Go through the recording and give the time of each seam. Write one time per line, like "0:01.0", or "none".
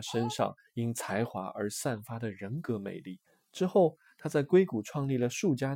0:03.3